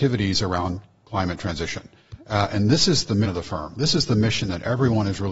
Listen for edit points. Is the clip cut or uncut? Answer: cut